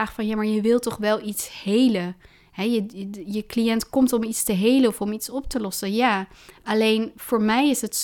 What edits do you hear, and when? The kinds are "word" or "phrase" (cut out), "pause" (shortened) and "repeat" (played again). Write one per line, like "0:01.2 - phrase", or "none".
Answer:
none